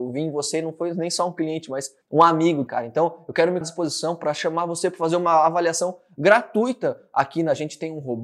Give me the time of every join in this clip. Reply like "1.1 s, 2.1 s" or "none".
2.0 s, 2.7 s, 3.6 s